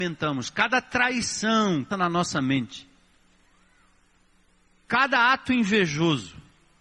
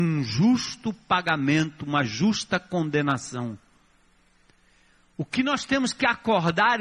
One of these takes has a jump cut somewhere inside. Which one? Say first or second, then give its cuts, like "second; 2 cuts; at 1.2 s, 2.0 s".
first; 1 cut; at 1.9 s